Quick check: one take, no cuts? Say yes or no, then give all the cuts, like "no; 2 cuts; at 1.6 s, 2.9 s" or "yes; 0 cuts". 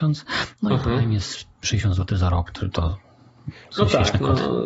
yes; 0 cuts